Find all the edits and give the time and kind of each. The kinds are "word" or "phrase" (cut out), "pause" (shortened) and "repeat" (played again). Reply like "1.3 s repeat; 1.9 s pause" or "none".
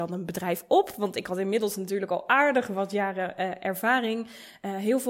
none